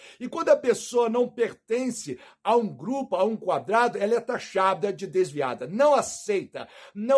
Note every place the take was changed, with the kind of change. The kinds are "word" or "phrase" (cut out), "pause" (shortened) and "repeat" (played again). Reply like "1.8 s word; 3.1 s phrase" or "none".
none